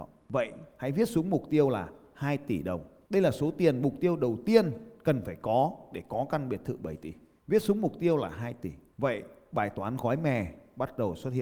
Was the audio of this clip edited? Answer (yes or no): no